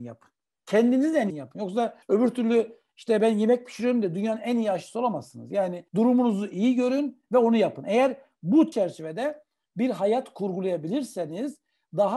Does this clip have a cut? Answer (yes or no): yes